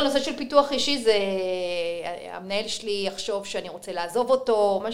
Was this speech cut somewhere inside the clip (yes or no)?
no